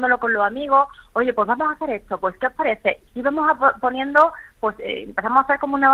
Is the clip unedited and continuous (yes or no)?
no